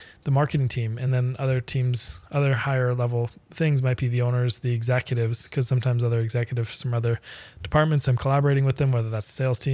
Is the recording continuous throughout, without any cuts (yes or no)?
yes